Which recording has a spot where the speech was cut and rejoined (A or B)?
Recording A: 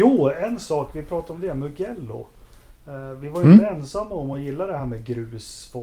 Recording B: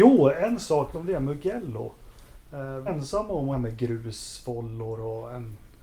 B